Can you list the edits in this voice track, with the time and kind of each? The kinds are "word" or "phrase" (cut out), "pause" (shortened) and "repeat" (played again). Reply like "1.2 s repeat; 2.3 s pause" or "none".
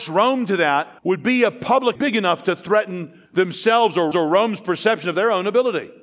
1.0 s pause; 2.0 s word; 3.3 s pause; 4.1 s repeat